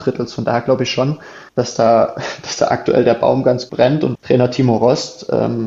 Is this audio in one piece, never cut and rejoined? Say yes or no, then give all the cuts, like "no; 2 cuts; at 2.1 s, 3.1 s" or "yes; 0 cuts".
no; 3 cuts; at 1.5 s, 3.7 s, 4.1 s